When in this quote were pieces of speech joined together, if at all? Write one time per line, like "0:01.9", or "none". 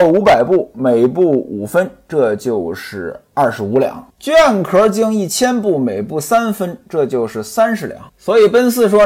0:04.1
0:08.1

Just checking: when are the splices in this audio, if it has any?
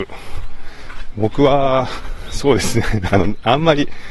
0:03.1

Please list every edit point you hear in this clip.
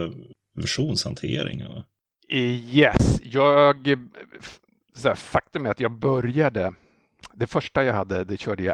none

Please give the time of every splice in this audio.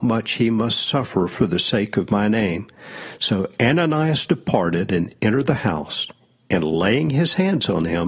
none

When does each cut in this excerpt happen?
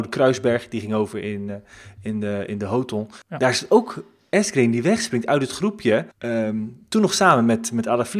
0:03.2
0:06.1

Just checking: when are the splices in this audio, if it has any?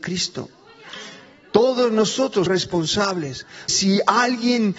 0:02.5
0:03.7

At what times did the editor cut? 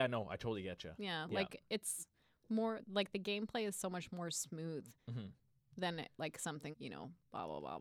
0:05.0
0:06.7

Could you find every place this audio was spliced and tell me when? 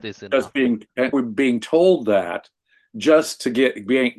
0:01.1

